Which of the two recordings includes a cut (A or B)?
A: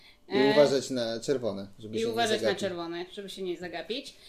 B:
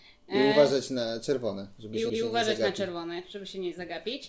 B